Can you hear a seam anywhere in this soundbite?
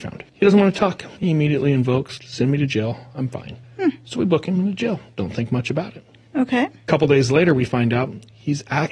no; 0 cuts

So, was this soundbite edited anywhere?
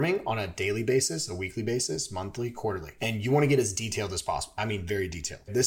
no; 0 cuts

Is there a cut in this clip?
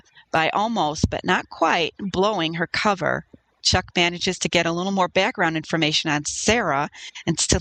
no; 0 cuts

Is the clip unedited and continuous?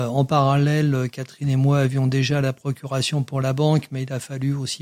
yes; 0 cuts

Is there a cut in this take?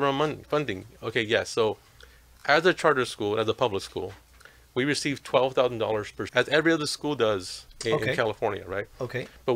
yes; 1 cut; at 6.3 s

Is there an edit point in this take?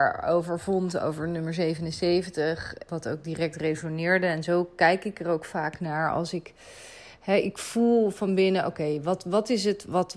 yes; 1 cut; at 2.9 s

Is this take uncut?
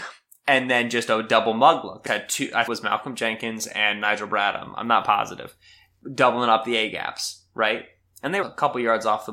no; 3 cuts; at 2.1 s, 2.7 s, 8.4 s

